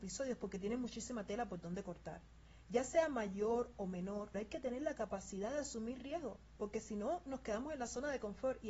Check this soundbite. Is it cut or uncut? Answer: cut